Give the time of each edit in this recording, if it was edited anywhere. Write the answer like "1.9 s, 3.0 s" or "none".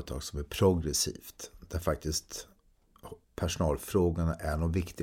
3.2 s